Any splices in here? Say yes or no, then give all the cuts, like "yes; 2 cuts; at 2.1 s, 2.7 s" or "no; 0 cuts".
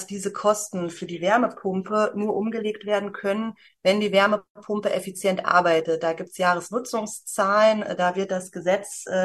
no; 0 cuts